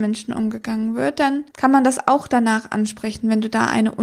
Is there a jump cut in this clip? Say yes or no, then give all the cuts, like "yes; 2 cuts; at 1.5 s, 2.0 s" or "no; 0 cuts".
yes; 1 cut; at 1.5 s